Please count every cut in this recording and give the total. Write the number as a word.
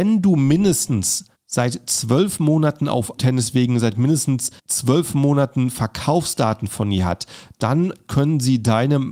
three